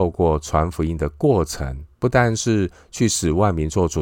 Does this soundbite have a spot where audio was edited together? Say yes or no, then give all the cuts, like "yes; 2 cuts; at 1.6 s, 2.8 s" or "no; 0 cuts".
yes; 1 cut; at 1.9 s